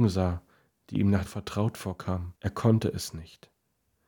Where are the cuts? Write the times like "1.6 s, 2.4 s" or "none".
1.3 s, 2.4 s